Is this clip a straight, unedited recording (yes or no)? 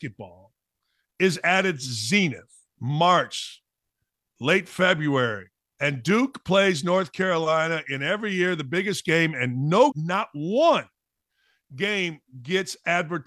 no